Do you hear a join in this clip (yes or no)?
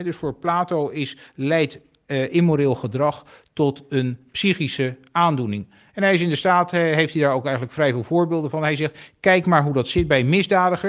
no